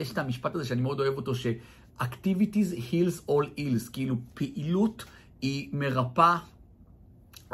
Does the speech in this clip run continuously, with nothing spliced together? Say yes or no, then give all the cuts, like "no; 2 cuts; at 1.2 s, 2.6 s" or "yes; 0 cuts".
yes; 0 cuts